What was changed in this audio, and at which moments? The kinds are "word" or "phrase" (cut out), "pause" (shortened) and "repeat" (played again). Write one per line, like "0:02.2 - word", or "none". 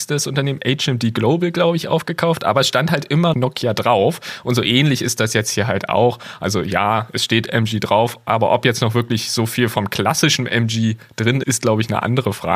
0:03.3 - word
0:11.4 - word